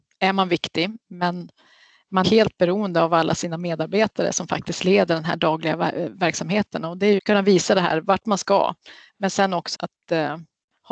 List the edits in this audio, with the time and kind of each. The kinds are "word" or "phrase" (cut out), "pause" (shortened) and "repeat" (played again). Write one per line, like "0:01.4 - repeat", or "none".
0:02.2 - phrase
0:07.2 - phrase
0:09.7 - word